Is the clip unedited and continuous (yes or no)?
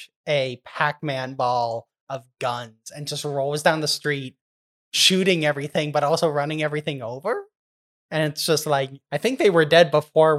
yes